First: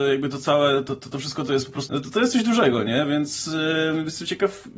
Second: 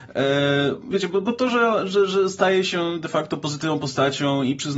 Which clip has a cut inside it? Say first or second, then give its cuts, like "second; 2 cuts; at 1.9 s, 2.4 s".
first; 1 cut; at 1.9 s